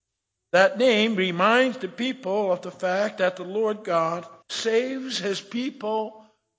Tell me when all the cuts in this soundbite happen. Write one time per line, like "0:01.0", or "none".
0:04.4